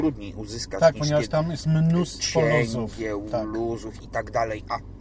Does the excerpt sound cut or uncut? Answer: uncut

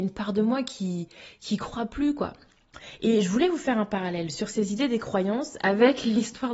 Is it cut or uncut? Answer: uncut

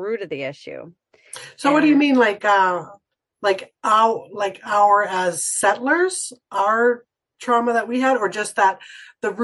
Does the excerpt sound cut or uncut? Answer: uncut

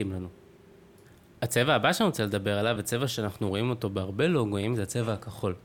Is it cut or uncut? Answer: uncut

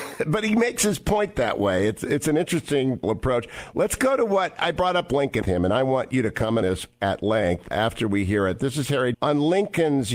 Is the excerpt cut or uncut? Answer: cut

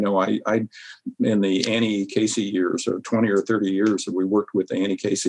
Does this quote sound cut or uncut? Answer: uncut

